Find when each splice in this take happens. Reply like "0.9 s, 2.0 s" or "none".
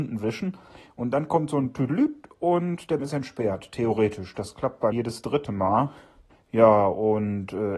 3.0 s, 4.9 s, 6.3 s

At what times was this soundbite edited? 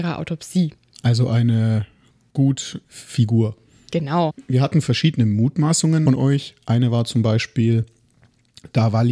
2.8 s, 6.1 s

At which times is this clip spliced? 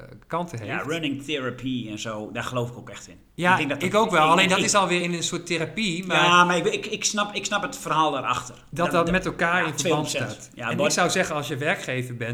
none

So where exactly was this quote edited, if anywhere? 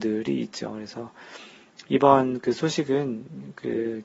none

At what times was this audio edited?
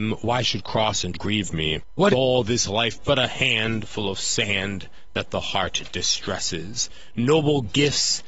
1.1 s, 2.1 s, 3.0 s

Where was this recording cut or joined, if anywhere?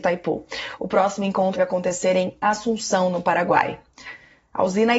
1.6 s

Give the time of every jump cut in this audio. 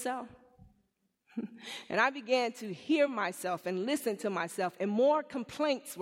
none

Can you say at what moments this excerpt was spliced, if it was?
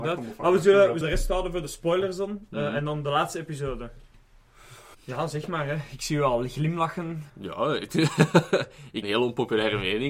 1.0 s, 4.9 s, 7.3 s, 9.0 s

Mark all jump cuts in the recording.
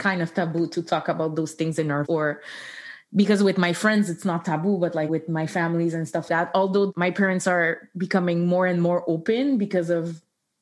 2.0 s, 5.1 s, 6.3 s

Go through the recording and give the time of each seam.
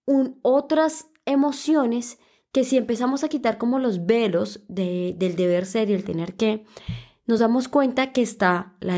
none

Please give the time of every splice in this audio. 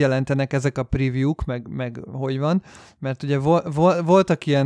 none

